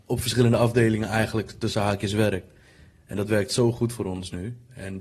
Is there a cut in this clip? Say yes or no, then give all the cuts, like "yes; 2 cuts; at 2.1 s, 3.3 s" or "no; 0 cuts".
no; 0 cuts